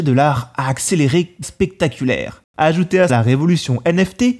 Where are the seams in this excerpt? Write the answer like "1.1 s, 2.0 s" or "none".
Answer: 1.4 s, 3.1 s